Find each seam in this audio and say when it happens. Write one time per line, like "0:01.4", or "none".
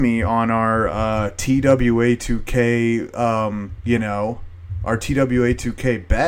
none